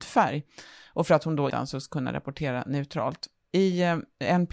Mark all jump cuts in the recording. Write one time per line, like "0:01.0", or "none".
0:01.5